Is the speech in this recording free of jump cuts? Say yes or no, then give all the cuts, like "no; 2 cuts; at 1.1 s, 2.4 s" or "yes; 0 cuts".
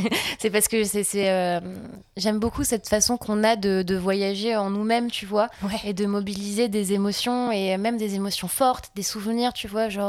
yes; 0 cuts